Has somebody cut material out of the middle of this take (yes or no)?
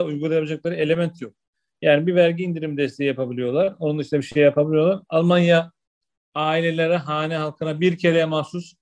no